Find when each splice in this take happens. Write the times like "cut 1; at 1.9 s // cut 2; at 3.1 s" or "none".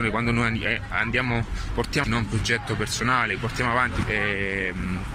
cut 1; at 2.0 s // cut 2; at 3.4 s // cut 3; at 4.0 s